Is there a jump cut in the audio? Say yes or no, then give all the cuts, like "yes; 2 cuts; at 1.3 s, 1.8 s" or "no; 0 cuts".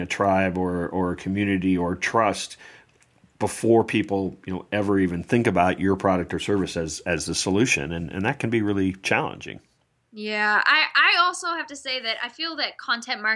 no; 0 cuts